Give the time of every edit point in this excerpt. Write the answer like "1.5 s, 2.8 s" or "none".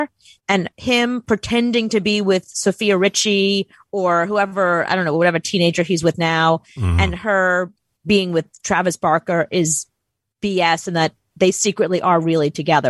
none

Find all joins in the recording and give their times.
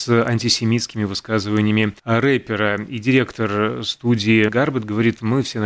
2.0 s, 4.5 s

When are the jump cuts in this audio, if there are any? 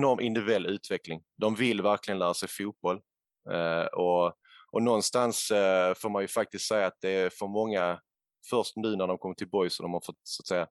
none

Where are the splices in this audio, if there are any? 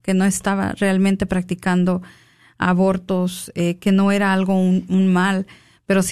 none

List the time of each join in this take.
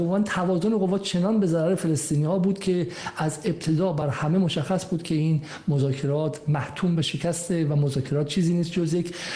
none

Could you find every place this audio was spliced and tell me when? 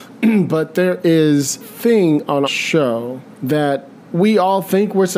1.6 s, 2.5 s, 3.3 s

